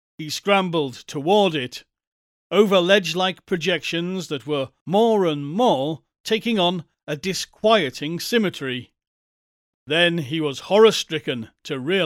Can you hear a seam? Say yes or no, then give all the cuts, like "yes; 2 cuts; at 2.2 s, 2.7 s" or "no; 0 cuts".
no; 0 cuts